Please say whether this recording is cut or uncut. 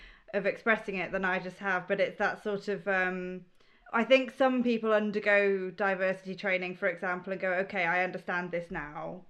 uncut